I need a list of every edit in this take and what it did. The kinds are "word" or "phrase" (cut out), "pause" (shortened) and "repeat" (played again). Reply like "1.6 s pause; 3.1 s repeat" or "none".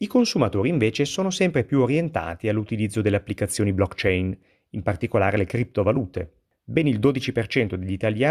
none

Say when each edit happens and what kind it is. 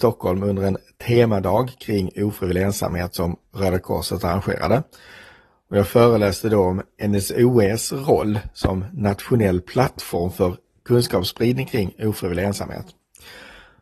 none

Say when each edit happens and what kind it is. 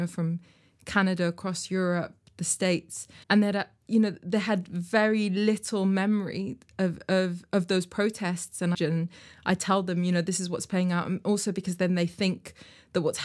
3.2 s pause; 8.7 s phrase

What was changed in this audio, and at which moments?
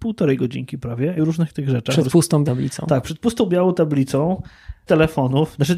1.2 s phrase; 2.5 s word; 4.9 s word

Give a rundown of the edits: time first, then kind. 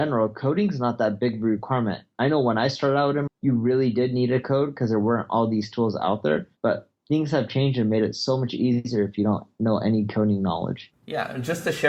3.3 s word; 6.6 s pause

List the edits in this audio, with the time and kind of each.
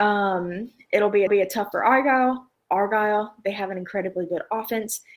1.3 s repeat; 1.7 s word

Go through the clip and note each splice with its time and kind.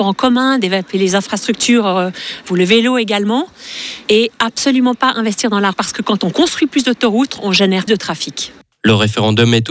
5.7 s word; 7.9 s word

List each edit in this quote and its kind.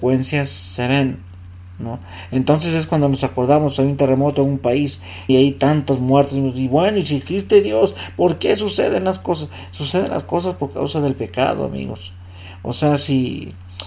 5.3 s phrase

